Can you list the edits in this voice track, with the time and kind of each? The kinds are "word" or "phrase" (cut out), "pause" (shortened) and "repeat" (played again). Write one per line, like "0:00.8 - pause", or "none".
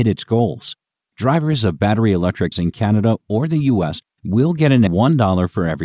0:02.5 - word
0:04.9 - word